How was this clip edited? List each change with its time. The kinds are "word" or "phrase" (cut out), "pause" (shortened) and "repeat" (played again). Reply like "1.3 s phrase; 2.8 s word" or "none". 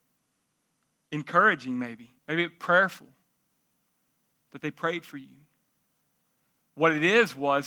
2.2 s pause